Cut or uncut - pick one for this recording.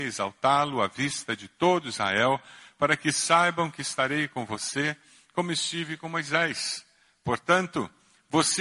uncut